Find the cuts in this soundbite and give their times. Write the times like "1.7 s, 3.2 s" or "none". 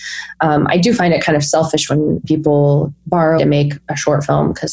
3.4 s